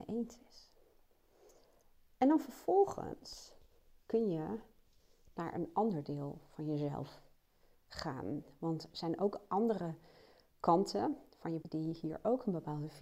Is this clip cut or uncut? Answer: cut